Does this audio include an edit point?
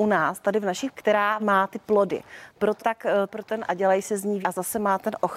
yes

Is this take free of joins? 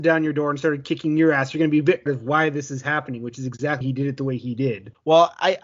no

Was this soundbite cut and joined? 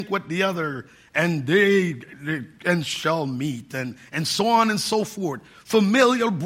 no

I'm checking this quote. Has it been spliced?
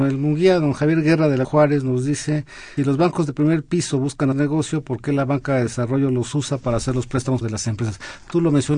yes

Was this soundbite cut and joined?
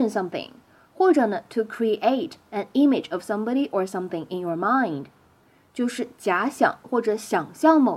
no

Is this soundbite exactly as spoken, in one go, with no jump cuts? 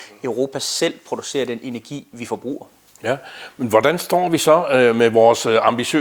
yes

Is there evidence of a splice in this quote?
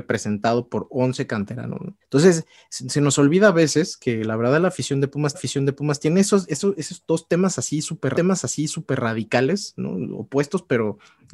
yes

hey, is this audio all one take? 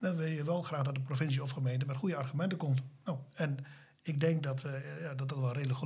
yes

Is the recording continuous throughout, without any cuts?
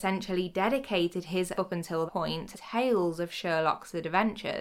no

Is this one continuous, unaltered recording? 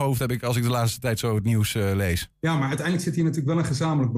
no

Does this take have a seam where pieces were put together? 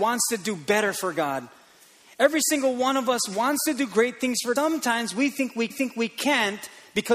yes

